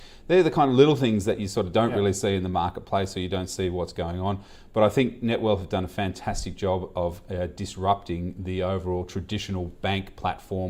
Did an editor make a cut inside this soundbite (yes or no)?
no